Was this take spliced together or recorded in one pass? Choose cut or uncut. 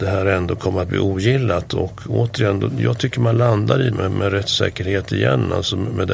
cut